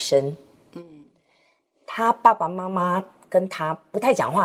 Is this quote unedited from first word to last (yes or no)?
yes